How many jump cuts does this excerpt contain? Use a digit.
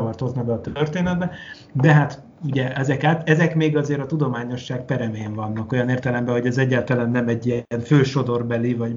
0